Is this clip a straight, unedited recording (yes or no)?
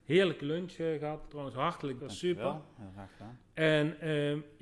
no